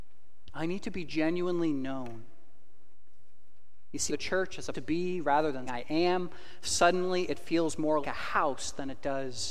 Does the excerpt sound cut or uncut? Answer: cut